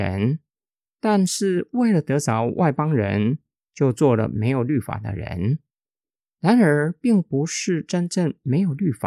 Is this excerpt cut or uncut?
uncut